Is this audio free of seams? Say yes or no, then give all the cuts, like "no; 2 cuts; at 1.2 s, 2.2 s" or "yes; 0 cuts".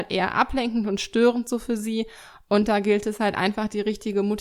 yes; 0 cuts